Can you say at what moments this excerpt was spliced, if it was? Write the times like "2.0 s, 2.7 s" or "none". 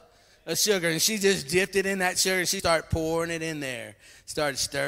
2.6 s